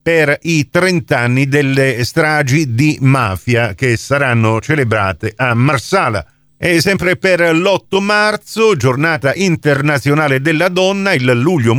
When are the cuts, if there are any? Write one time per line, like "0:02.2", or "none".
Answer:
none

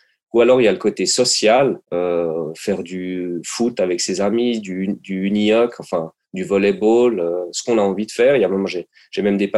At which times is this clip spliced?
0:01.8

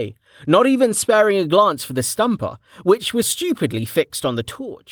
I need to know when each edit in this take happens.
0:03.2

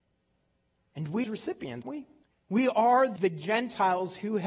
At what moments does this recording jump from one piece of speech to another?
0:01.2
0:01.8
0:02.2
0:03.2

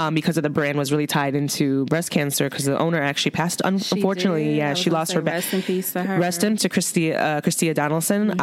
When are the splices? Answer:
0:06.6

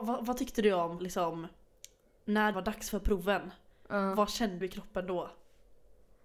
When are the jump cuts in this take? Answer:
0:01.0
0:02.5
0:04.6

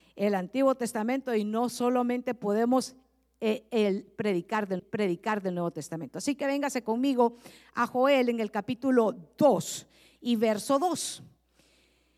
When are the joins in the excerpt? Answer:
0:04.8

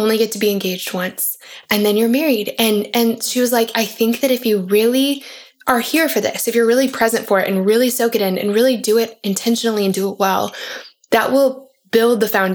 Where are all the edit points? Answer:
none

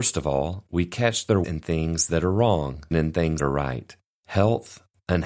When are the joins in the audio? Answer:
0:01.4
0:02.9
0:03.4

